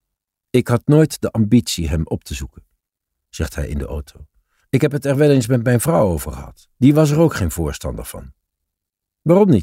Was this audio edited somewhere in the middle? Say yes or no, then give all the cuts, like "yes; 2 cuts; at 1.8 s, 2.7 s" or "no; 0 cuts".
yes; 1 cut; at 6.7 s